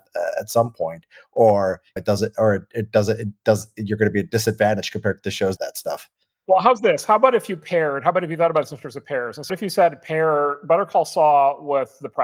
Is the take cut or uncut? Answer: cut